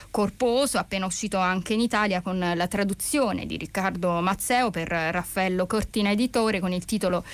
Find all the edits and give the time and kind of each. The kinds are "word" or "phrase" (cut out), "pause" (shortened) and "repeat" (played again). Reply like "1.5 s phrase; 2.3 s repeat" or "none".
none